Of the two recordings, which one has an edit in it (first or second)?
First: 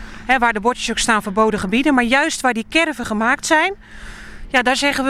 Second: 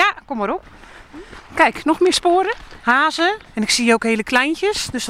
second